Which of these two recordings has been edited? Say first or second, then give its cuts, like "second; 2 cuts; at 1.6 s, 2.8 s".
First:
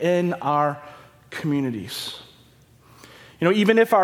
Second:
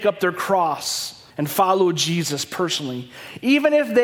second; 1 cut; at 1.3 s